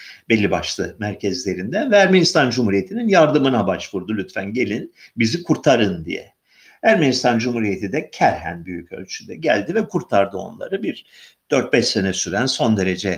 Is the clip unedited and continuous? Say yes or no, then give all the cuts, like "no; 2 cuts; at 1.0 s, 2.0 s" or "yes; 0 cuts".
yes; 0 cuts